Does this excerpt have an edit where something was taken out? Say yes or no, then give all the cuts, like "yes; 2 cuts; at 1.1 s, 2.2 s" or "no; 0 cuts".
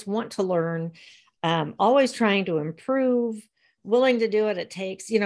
no; 0 cuts